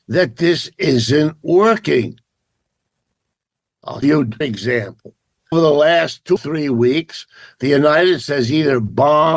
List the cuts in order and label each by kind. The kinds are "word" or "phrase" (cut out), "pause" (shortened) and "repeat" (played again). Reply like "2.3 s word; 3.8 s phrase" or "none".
4.0 s word; 4.4 s word; 5.5 s word; 6.4 s word; 8.2 s word